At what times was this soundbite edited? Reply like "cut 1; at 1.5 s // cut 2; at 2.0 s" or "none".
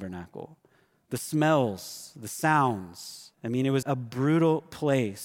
cut 1; at 3.3 s // cut 2; at 3.8 s